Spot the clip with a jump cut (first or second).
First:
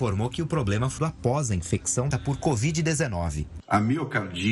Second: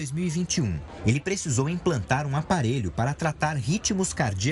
first